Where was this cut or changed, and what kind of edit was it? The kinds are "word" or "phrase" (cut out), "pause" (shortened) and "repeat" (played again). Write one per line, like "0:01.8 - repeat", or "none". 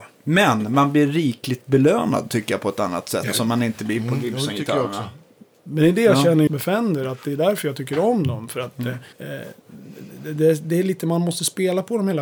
0:06.5 - word
0:09.1 - pause